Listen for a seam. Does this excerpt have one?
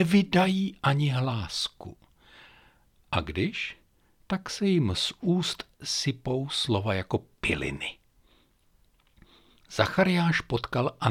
no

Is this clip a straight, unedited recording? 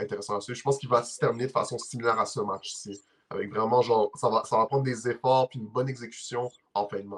yes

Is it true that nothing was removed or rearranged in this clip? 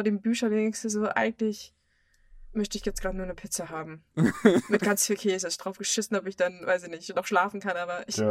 yes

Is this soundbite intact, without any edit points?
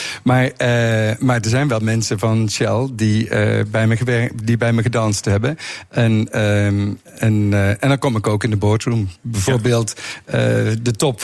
yes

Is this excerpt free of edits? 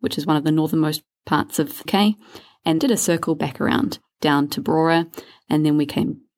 no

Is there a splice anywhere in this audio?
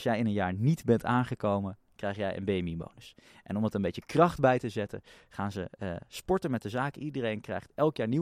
no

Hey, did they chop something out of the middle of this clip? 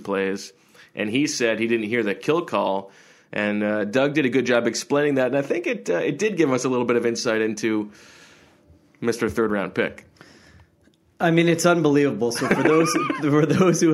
no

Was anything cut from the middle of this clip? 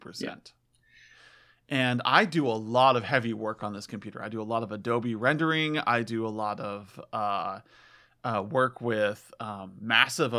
no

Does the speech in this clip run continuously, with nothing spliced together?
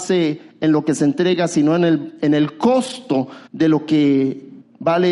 no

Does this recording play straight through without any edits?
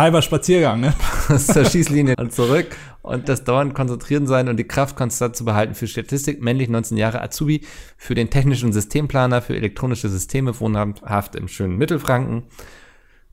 no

